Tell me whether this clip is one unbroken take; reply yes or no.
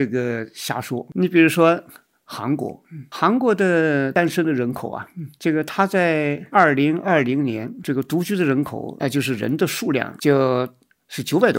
yes